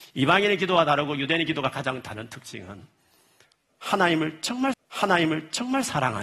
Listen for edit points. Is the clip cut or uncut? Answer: cut